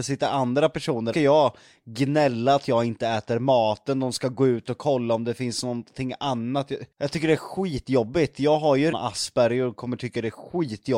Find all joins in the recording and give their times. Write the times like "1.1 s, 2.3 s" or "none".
1.1 s, 6.9 s, 8.9 s